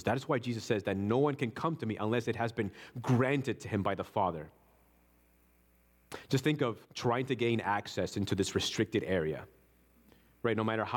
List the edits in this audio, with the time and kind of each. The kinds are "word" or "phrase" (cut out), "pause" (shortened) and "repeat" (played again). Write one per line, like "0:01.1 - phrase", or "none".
0:06.8 - pause

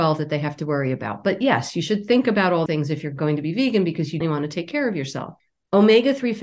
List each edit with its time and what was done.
0:02.7 - word
0:04.2 - word

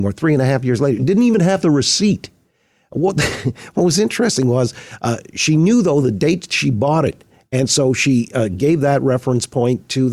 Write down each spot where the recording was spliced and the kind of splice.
none

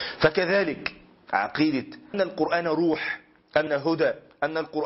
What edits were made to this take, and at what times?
0:02.1 - word
0:03.7 - word

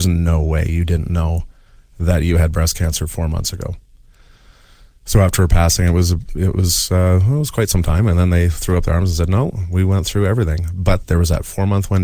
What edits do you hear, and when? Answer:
none

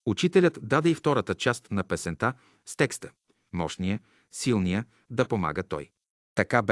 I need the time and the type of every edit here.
none

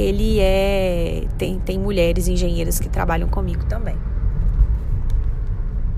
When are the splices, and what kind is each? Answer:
none

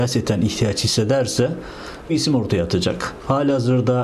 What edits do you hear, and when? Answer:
0:02.1 - word

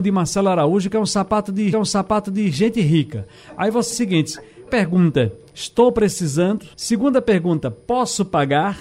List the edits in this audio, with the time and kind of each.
0:01.7 - repeat
0:03.9 - word
0:04.7 - word
0:06.7 - pause

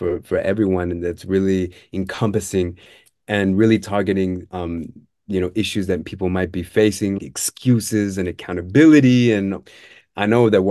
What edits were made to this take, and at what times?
0:07.2 - word

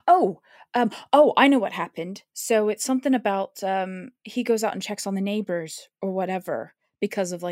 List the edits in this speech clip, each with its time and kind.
none

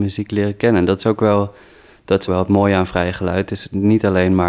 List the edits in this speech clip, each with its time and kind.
0:02.3 - word

